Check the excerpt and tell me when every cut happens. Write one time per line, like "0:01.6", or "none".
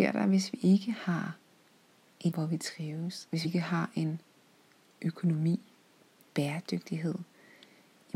0:02.3
0:03.4
0:05.0